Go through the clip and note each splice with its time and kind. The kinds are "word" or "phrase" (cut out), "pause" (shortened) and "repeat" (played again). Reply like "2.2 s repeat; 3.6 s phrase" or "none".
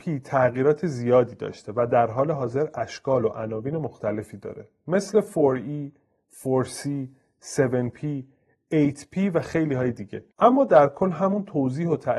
10.3 s pause